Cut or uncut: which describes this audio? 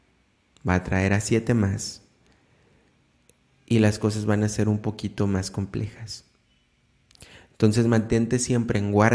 uncut